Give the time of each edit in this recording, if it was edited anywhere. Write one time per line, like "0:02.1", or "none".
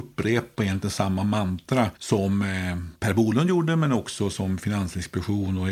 0:02.0